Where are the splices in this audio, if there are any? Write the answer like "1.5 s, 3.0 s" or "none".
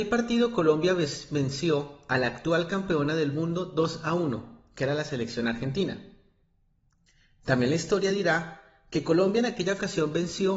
none

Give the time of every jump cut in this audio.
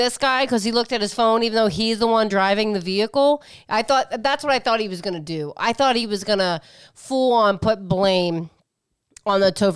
none

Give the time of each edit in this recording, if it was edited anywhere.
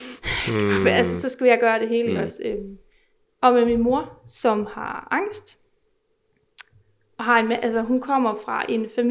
none

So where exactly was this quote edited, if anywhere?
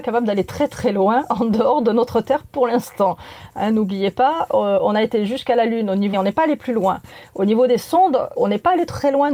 6.1 s, 8.4 s

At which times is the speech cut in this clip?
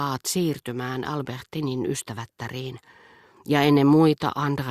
none

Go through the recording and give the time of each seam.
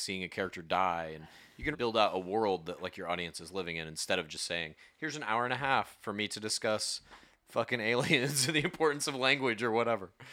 1.7 s

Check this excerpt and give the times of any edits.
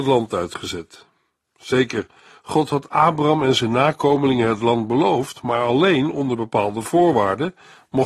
none

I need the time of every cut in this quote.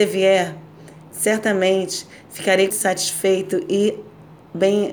1.1 s, 2.7 s

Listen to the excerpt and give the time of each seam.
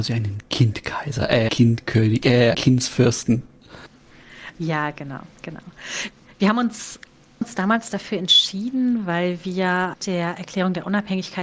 1.5 s, 2.5 s, 7.4 s, 9.9 s

